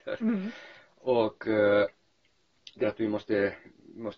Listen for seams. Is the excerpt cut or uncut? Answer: cut